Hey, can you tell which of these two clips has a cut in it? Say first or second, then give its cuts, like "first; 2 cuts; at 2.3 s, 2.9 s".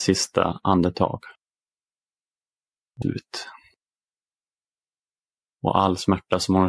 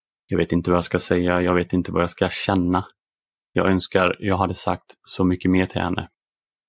first; 1 cut; at 3.0 s